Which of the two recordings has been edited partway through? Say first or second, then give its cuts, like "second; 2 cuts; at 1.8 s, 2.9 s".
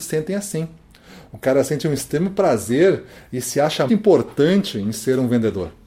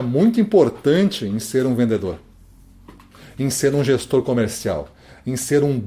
first; 1 cut; at 3.9 s